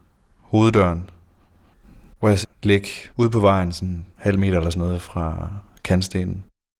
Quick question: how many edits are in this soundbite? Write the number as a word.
four